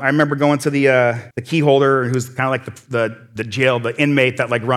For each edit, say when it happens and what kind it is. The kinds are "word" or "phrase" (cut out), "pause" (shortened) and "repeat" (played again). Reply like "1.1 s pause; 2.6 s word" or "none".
1.3 s pause

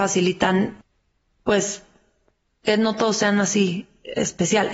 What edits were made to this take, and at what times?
none

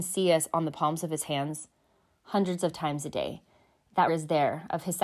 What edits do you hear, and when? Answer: 4.1 s word

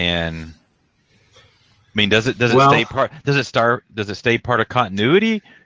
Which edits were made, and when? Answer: none

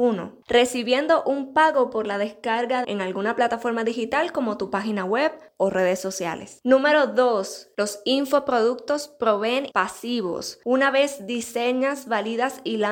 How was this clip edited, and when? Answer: 2.8 s phrase; 9.7 s word

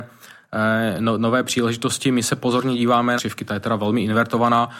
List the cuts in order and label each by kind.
3.2 s phrase

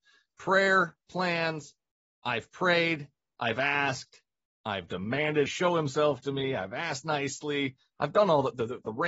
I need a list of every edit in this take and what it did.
5.5 s word

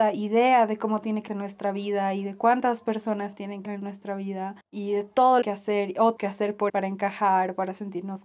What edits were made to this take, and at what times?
1.3 s word; 3.7 s word; 4.6 s pause; 5.4 s phrase; 6.2 s word; 6.7 s word

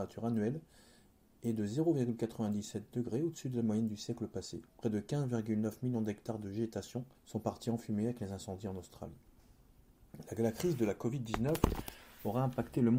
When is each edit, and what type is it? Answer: 4.7 s pause; 7.1 s pause

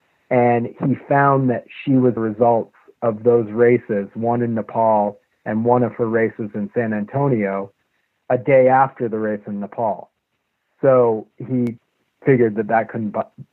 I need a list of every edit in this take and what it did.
2.2 s phrase; 11.3 s pause

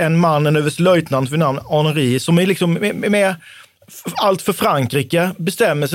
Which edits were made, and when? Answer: none

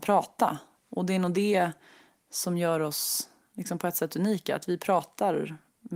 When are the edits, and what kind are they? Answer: none

